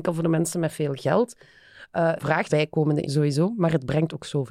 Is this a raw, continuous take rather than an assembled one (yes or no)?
no